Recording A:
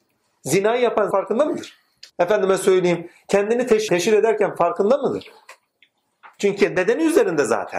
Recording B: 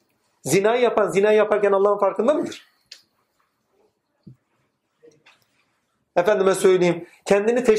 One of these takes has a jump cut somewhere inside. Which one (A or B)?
A